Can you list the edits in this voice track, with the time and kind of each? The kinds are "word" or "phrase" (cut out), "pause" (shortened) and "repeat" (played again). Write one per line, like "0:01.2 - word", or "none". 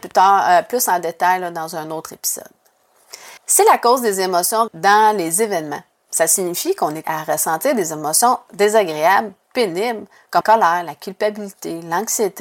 0:03.4 - pause
0:04.7 - word
0:07.0 - word
0:10.4 - word